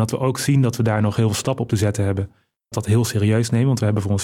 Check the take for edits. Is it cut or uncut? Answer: cut